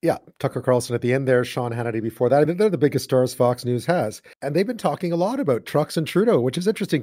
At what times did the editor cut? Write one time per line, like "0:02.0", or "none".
0:02.4
0:04.3